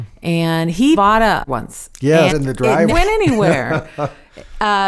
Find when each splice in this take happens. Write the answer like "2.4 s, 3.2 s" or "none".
0.9 s, 1.5 s, 2.3 s, 2.9 s